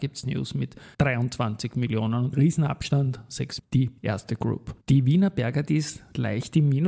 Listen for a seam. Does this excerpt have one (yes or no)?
yes